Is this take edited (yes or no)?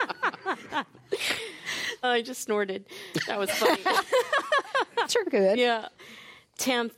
yes